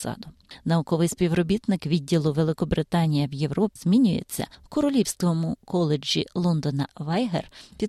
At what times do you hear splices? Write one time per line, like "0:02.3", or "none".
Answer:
0:03.8
0:06.9